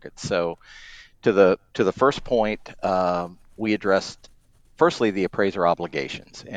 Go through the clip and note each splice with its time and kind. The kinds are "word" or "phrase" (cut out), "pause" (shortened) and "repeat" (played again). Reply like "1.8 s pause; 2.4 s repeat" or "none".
1.7 s pause